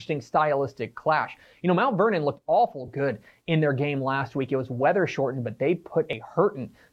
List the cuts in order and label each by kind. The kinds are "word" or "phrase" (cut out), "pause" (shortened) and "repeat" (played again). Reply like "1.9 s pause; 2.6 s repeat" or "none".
none